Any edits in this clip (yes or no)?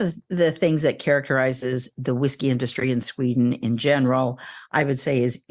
no